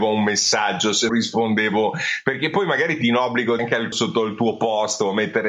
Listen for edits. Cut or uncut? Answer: cut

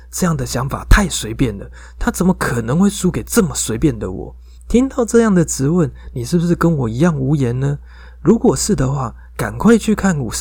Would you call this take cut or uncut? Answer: cut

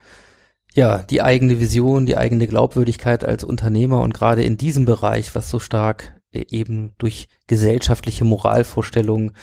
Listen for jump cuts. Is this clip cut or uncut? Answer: uncut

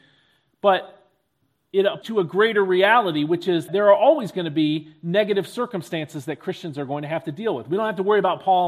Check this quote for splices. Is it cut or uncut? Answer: cut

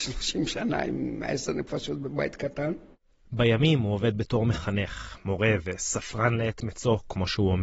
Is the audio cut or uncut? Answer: uncut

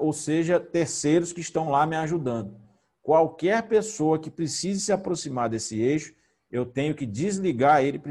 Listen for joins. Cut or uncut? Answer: uncut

